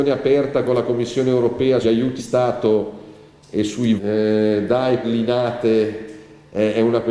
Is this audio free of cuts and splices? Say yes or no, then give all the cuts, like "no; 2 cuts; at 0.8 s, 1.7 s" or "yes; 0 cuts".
no; 4 cuts; at 1.8 s, 2.2 s, 4.0 s, 5.0 s